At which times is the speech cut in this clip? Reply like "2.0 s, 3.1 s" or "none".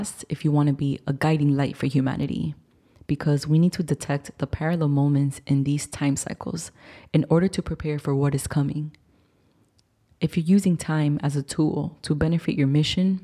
none